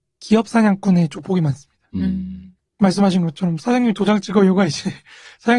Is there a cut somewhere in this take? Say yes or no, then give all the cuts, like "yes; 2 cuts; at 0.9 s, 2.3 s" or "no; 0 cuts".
no; 0 cuts